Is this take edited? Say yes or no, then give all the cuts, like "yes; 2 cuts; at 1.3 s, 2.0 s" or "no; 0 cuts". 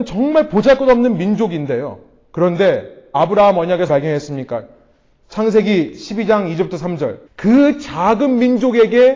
yes; 3 cuts; at 3.1 s, 3.9 s, 7.3 s